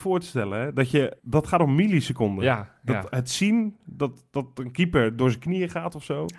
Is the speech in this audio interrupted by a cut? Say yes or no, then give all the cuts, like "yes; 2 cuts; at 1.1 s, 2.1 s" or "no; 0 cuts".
yes; 1 cut; at 1.2 s